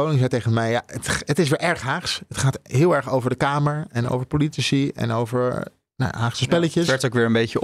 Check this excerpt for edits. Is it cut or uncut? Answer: uncut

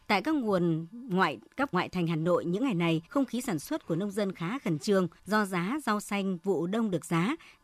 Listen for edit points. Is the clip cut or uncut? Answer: cut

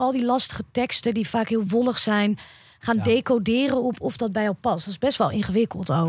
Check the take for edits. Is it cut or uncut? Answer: uncut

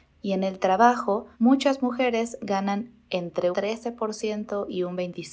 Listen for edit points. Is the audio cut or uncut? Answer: cut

